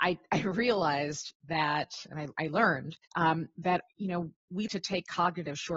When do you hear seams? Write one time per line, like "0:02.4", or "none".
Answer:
0:03.0
0:03.9
0:04.7